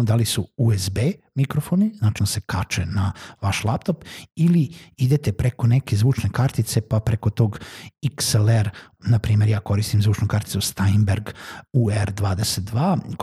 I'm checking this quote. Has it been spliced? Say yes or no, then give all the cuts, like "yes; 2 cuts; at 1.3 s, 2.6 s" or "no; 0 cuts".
yes; 2 cuts; at 2.2 s, 9.0 s